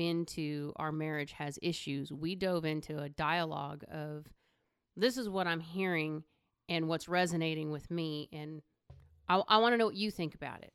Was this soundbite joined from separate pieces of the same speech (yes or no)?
no